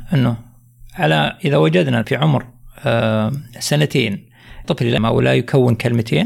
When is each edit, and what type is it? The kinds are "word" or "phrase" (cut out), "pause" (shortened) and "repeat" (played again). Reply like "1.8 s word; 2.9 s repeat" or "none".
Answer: 2.0 s word; 4.6 s word; 5.0 s word